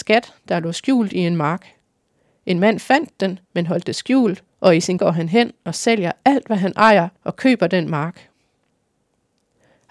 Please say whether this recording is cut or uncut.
cut